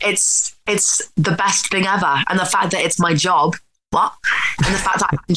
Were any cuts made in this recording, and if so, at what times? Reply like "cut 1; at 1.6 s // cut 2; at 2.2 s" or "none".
none